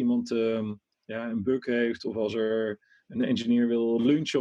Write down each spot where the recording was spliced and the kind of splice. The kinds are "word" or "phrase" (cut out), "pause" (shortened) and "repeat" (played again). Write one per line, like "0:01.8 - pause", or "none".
none